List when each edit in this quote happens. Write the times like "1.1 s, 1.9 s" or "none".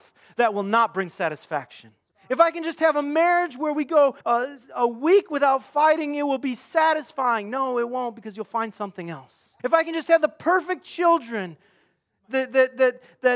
2.1 s, 4.2 s, 9.6 s

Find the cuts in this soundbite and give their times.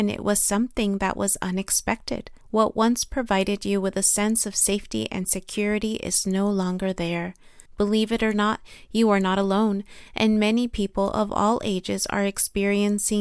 2.4 s, 7.7 s

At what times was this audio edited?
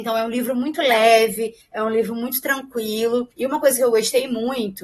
3.3 s

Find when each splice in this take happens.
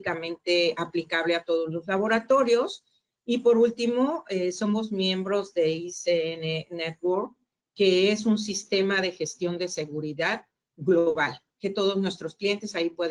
none

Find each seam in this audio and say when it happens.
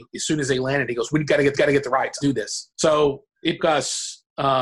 1.5 s, 2.2 s, 2.7 s, 3.6 s

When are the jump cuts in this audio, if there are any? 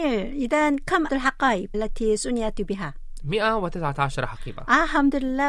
1.1 s, 1.7 s

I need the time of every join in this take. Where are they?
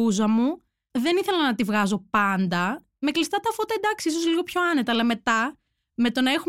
none

